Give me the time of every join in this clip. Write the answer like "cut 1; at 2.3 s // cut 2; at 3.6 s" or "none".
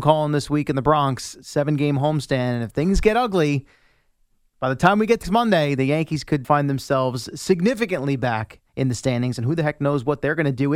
cut 1; at 5.2 s // cut 2; at 6.4 s // cut 3; at 8.7 s